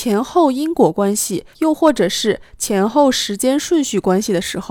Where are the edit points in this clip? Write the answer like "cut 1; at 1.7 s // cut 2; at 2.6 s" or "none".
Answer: cut 1; at 1.5 s